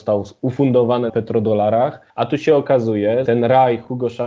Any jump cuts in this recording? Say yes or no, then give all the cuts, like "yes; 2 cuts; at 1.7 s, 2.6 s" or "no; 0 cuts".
yes; 3 cuts; at 1.1 s, 2.1 s, 3.3 s